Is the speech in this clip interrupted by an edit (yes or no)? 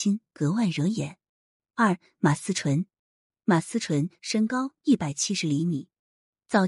no